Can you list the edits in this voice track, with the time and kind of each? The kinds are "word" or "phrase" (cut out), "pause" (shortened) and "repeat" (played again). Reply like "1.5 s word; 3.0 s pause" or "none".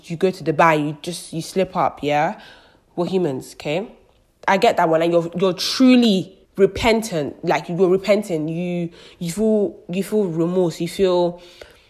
6.4 s pause